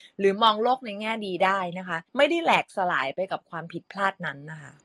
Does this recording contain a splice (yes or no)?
yes